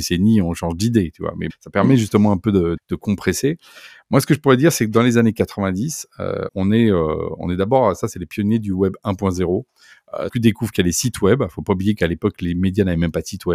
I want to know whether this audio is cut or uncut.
cut